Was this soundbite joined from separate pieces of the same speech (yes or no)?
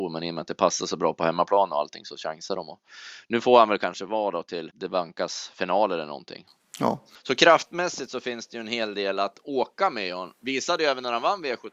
yes